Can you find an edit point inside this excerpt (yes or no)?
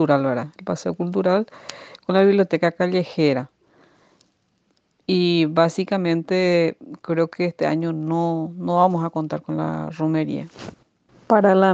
no